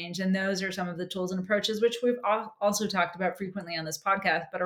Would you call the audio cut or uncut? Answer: uncut